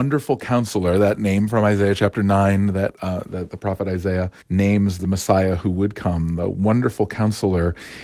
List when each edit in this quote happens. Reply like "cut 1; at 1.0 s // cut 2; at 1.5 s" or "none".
cut 1; at 4.4 s